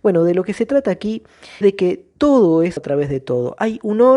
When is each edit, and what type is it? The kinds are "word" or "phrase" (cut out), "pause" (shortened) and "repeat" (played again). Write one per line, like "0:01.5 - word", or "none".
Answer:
0:01.6 - word
0:02.8 - word